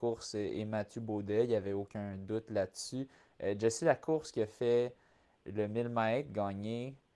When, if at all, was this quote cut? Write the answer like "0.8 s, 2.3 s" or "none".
none